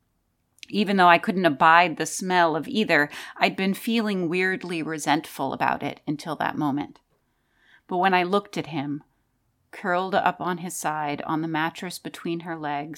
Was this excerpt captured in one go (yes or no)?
yes